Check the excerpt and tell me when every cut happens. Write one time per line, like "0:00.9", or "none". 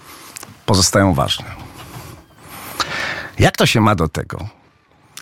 none